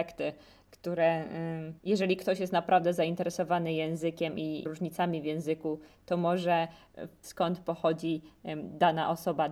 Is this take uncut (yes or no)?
no